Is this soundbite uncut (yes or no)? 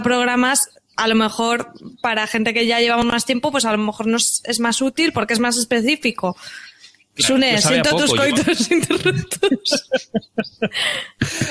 yes